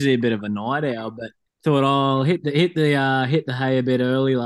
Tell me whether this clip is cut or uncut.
cut